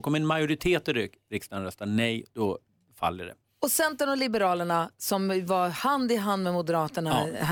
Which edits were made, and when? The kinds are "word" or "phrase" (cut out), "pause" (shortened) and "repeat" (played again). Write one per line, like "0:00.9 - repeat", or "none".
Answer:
none